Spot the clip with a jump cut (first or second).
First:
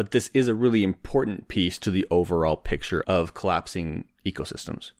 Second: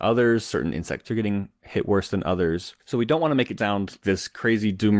second